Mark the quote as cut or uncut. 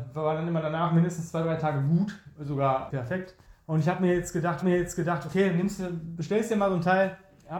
cut